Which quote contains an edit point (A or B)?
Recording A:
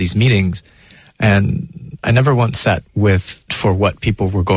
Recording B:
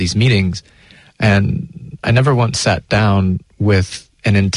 A